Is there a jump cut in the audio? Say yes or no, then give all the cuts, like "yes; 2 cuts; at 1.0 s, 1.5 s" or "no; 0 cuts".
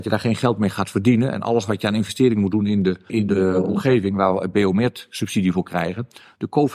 yes; 1 cut; at 3.1 s